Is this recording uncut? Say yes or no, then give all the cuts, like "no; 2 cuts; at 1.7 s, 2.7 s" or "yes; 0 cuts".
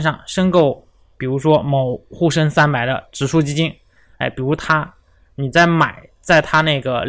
yes; 0 cuts